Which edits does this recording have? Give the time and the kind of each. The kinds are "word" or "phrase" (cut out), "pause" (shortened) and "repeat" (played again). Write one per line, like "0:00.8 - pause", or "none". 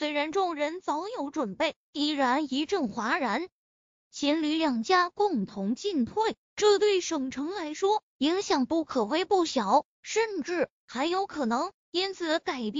0:03.8 - pause